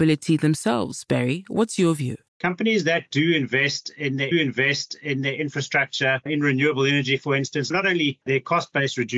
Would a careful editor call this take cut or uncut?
cut